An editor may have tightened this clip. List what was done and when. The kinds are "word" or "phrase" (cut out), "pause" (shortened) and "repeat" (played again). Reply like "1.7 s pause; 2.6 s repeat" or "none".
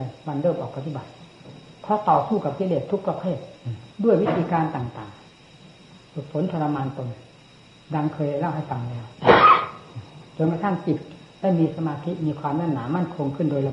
3.9 s pause